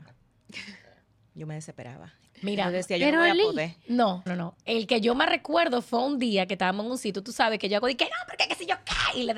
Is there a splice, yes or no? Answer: yes